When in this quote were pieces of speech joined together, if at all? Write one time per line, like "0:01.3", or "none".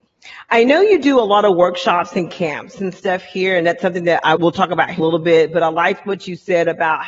0:04.4
0:05.0